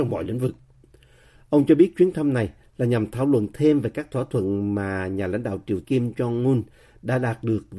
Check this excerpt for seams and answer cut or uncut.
cut